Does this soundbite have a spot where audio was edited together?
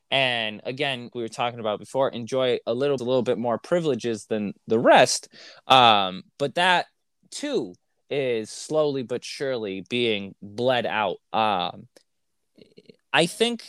yes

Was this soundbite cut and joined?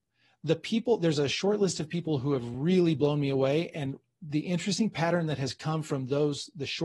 no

